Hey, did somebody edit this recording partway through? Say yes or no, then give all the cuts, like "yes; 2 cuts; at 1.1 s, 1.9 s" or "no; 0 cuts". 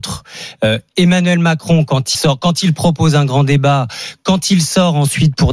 yes; 1 cut; at 2.1 s